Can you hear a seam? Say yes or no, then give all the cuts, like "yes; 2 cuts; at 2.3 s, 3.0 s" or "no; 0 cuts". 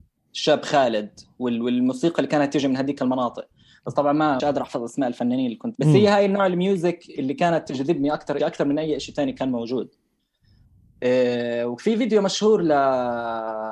yes; 3 cuts; at 4.4 s, 5.7 s, 8.4 s